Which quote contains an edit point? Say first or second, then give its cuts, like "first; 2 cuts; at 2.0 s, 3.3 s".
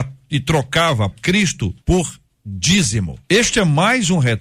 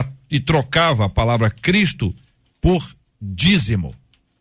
first; 3 cuts; at 1.1 s, 1.8 s, 3.2 s